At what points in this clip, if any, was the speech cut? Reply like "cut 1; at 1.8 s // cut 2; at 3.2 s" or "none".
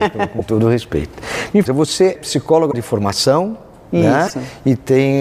cut 1; at 1.7 s // cut 2; at 2.2 s